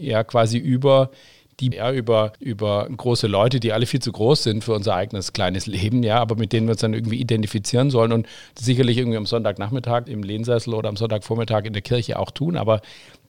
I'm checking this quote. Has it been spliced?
yes; 3 cuts; at 1.7 s, 2.3 s, 10.1 s

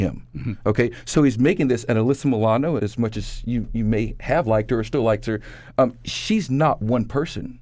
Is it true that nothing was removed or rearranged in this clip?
no; 1 cut; at 2.8 s

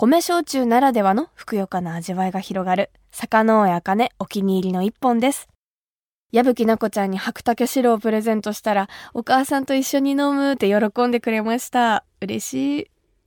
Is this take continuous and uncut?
yes; 0 cuts

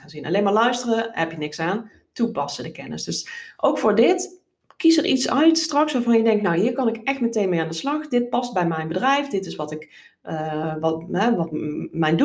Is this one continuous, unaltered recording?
yes; 0 cuts

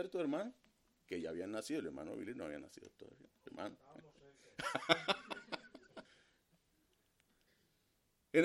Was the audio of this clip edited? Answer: yes; 1 cut; at 6.0 s

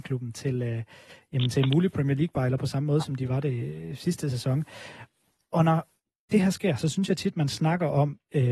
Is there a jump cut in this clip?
no; 0 cuts

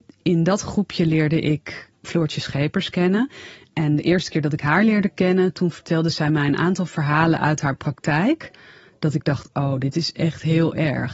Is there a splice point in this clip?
no; 0 cuts

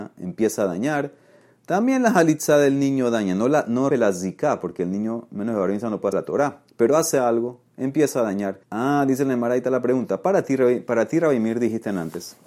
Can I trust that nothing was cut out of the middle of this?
no; 3 cuts; at 3.9 s, 6.1 s, 8.6 s

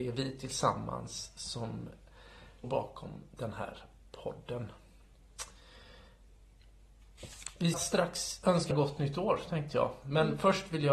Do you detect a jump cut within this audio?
yes; 3 cuts; at 2.6 s, 7.7 s, 8.7 s

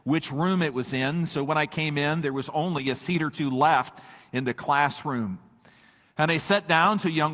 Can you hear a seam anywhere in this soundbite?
no; 0 cuts

